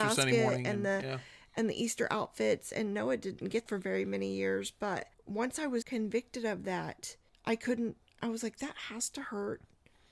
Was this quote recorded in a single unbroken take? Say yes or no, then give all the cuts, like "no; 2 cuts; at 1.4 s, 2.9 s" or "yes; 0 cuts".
no; 5 cuts; at 3.7 s, 5.1 s, 5.8 s, 7.3 s, 8.2 s